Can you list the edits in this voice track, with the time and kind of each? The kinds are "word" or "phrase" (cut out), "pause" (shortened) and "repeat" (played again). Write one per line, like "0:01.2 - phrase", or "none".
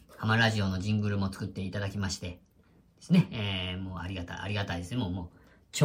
none